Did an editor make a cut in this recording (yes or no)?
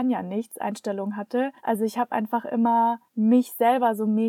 yes